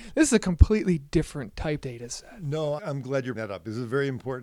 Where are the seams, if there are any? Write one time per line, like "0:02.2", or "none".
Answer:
0:01.8
0:02.8
0:03.3